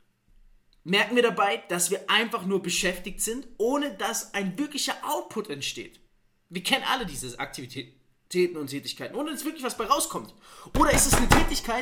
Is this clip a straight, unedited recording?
yes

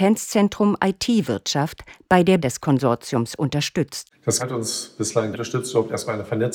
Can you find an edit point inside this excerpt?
yes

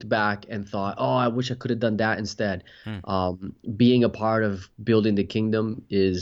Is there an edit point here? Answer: no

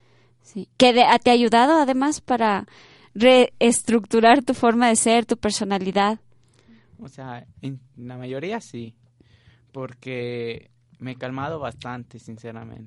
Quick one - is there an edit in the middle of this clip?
no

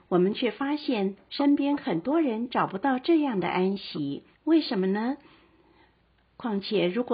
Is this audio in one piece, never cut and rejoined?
no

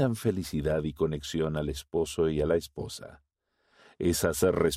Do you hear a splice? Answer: no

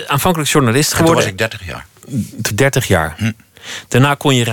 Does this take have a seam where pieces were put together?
yes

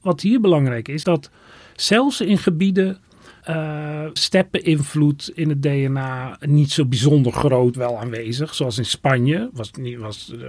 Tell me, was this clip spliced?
yes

